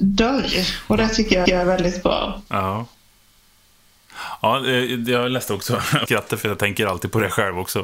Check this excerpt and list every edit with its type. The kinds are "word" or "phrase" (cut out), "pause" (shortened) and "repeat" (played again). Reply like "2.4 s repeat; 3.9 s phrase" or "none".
1.5 s repeat; 6.1 s phrase